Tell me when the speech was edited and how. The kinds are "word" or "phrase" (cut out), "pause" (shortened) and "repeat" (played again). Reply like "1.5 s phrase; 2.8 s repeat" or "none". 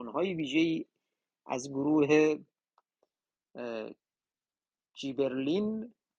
none